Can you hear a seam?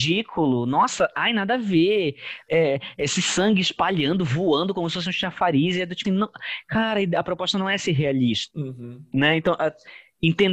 yes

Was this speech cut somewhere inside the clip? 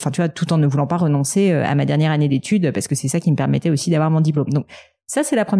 no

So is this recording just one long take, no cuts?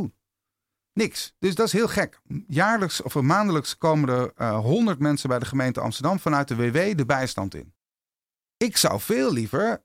no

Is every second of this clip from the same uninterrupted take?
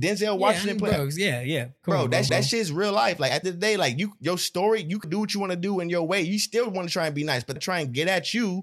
no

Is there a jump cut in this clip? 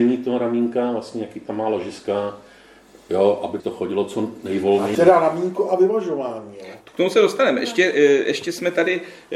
yes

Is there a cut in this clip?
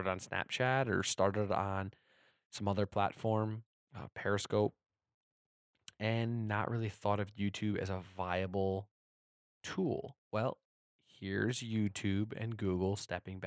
no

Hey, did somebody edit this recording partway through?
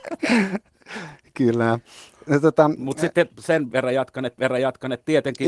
yes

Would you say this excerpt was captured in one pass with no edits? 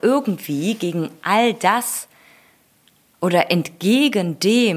yes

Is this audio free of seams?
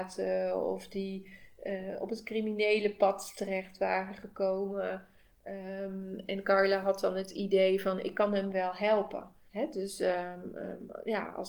no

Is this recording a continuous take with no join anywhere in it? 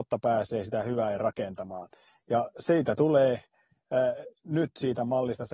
yes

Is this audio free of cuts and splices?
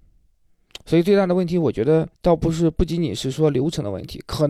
no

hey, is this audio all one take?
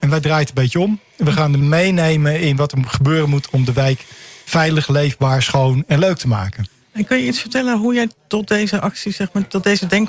no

